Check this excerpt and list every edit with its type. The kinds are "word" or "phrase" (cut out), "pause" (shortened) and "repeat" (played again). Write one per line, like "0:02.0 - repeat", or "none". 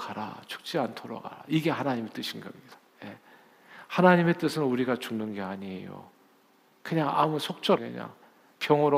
0:07.8 - word